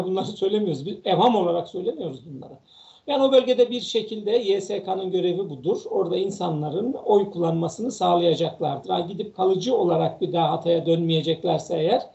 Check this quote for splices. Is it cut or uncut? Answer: uncut